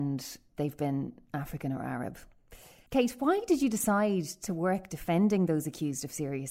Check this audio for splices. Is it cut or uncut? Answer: uncut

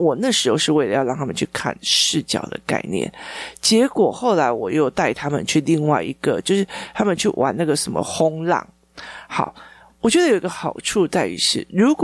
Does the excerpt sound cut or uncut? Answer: uncut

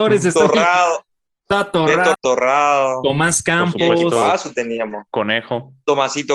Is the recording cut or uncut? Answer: cut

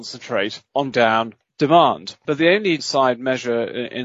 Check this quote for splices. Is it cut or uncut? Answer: cut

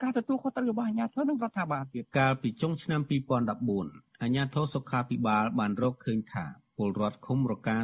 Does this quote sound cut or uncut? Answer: cut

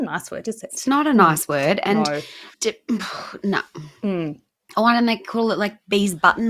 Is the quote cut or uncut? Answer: cut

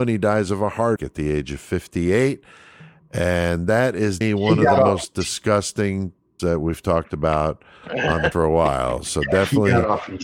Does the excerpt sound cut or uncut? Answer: cut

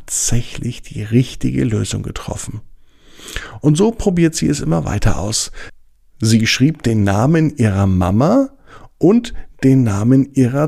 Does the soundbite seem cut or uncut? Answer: uncut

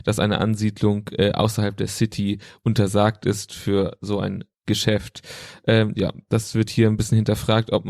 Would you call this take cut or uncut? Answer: uncut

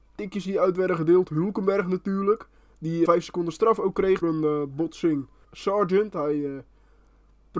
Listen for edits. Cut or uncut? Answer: cut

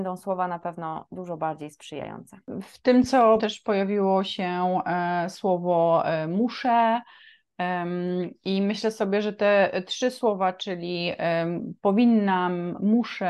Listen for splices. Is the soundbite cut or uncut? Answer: cut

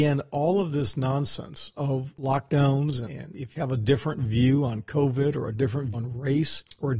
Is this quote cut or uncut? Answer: cut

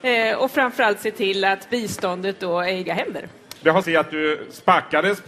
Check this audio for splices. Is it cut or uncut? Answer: cut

